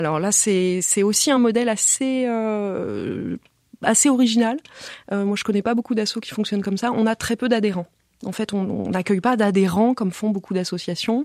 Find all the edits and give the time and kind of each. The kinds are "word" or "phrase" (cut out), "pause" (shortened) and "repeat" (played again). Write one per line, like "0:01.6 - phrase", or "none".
none